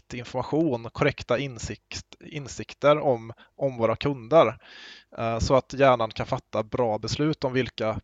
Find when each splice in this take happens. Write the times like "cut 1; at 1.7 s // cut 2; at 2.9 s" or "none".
none